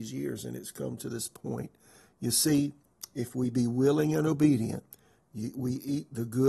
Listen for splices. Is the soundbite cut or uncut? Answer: uncut